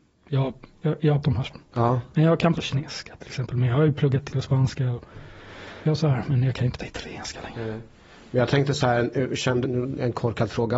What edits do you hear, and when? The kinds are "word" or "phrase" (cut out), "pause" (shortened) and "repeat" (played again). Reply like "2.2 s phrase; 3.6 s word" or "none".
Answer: 1.2 s word; 2.5 s word; 4.3 s word; 5.8 s word; 6.8 s word; 9.6 s word